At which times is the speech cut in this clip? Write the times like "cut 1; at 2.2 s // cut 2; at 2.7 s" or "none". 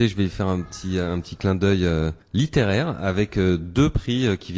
cut 1; at 2.2 s